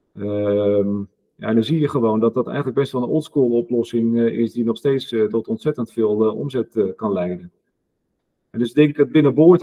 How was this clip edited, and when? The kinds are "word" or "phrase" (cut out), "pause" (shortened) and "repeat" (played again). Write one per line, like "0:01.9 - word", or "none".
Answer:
none